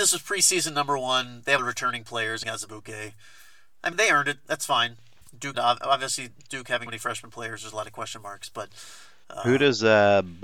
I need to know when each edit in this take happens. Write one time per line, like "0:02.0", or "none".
0:01.6
0:02.4
0:03.9
0:05.5
0:06.9

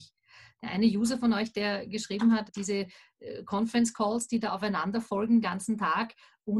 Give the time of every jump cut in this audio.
0:02.5
0:05.4

